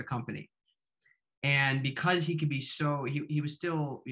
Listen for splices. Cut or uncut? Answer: uncut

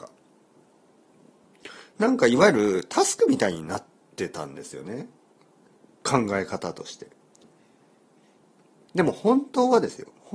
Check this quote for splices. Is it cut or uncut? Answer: uncut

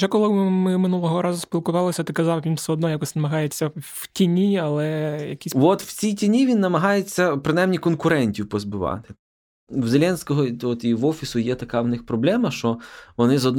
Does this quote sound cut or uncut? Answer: uncut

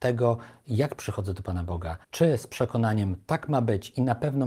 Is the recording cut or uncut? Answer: cut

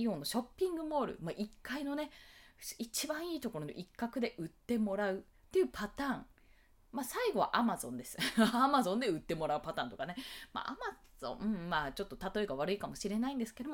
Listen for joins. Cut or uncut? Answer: uncut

